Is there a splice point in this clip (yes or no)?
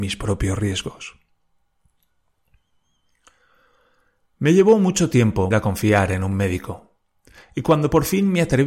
yes